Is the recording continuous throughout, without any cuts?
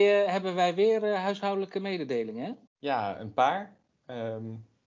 no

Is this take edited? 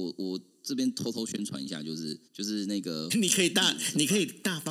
yes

